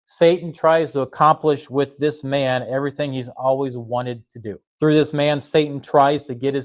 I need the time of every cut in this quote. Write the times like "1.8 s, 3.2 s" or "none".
4.7 s

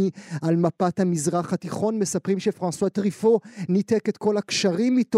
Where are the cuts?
none

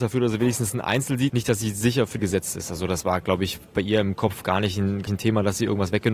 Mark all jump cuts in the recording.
1.3 s, 2.2 s, 5.1 s

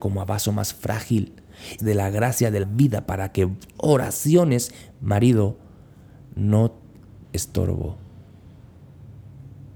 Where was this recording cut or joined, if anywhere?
1.8 s, 2.6 s, 3.8 s, 7.2 s

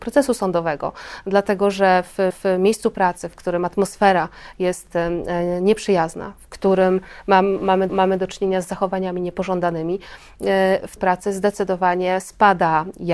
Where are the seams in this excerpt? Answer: 2.3 s, 7.9 s, 11.0 s

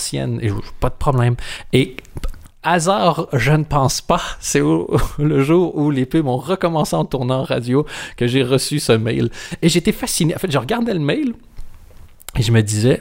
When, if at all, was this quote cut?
none

